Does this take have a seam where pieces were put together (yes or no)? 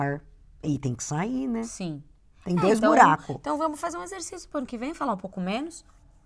no